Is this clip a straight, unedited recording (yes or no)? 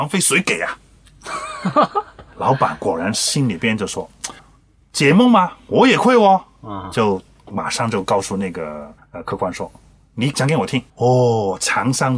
no